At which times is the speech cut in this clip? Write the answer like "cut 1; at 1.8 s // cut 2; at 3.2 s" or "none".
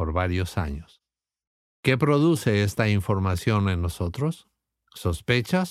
cut 1; at 1.5 s